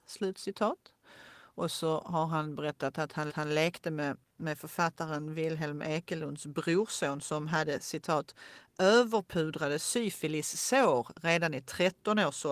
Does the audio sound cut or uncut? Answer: cut